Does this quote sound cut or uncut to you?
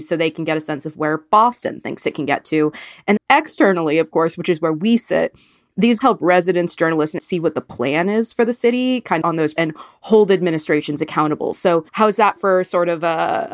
cut